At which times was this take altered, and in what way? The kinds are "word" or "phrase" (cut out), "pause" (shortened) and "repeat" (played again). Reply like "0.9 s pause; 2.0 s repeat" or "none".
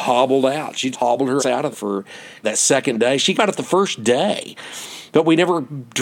0.9 s word; 1.4 s word; 1.7 s word; 2.4 s word; 3.3 s word